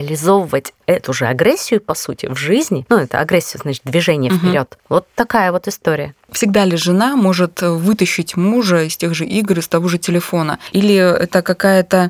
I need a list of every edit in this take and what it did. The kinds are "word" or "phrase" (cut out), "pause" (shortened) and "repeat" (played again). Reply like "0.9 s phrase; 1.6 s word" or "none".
none

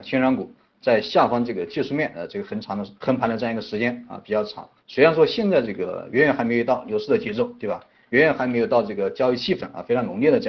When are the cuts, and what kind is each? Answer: 3.0 s pause; 4.8 s pause

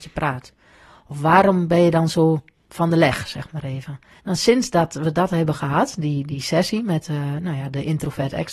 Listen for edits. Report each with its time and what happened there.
4.2 s pause

